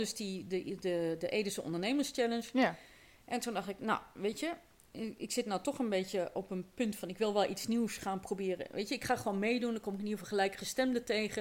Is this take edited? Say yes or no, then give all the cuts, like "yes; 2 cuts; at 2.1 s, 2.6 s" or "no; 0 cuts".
no; 0 cuts